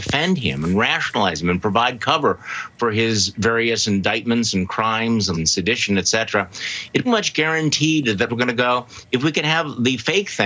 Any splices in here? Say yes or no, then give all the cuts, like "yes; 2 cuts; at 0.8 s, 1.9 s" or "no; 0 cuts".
yes; 3 cuts; at 5.3 s, 7.0 s, 8.3 s